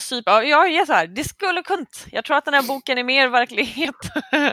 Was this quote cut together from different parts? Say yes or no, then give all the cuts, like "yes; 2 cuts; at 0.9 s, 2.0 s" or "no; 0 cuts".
yes; 1 cut; at 1.8 s